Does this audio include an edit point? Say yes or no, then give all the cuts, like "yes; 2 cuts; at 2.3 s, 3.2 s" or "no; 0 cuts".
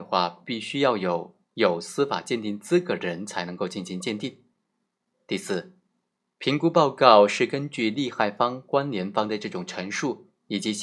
no; 0 cuts